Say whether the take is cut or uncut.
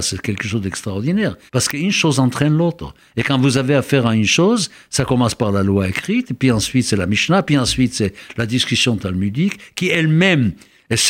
cut